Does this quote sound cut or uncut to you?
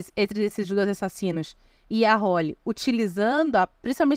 uncut